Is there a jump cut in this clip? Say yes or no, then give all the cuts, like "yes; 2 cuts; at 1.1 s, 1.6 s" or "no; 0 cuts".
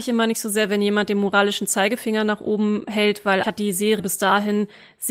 yes; 2 cuts; at 3.4 s, 4.0 s